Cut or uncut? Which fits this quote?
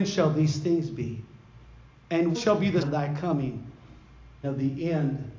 cut